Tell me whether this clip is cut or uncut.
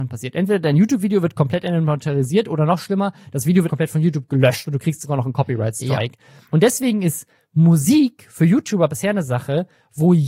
cut